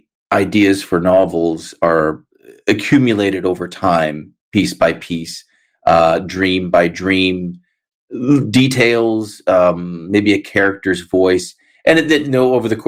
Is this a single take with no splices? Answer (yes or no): yes